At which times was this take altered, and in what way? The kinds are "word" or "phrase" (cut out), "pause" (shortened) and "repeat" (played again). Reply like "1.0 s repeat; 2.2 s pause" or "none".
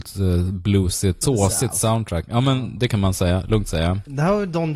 1.2 s word

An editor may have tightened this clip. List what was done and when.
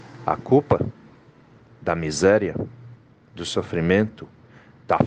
none

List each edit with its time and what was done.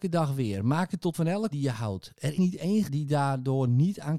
1.1 s word; 1.5 s word; 2.4 s word; 2.9 s word

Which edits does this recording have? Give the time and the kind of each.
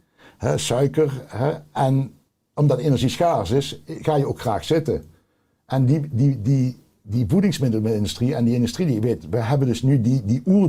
none

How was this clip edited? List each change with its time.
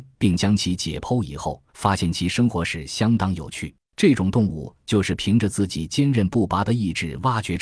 1.7 s pause; 3.8 s pause

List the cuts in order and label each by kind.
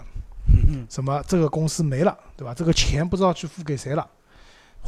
none

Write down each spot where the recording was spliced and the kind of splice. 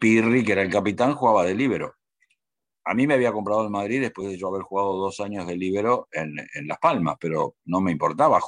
none

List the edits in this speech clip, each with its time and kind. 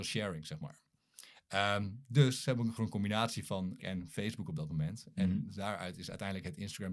2.8 s word; 3.8 s word

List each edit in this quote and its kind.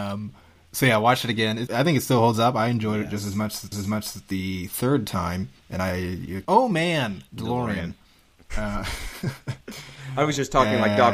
1.7 s word; 3.7 s repeat; 5.6 s pause; 6.4 s phrase; 7.3 s pause; 9.6 s pause

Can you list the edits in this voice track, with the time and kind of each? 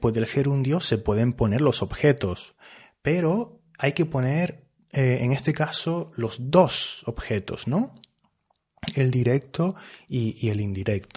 none

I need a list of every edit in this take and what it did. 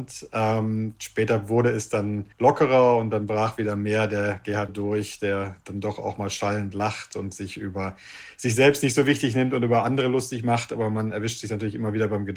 2.3 s pause; 4.7 s word

